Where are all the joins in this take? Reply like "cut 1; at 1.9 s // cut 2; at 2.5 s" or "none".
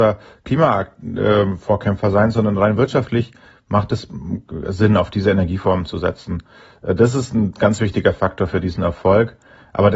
none